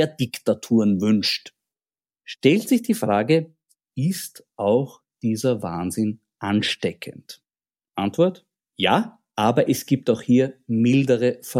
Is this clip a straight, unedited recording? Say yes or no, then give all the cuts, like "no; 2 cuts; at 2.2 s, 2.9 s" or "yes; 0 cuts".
yes; 0 cuts